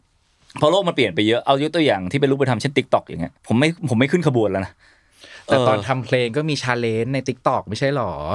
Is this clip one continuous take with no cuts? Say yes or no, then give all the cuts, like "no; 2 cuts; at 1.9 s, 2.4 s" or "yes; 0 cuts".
no; 1 cut; at 3.4 s